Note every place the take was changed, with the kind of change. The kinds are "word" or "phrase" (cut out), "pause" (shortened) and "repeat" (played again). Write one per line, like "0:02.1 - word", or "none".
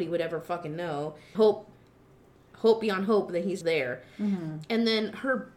0:01.3 - word
0:03.6 - word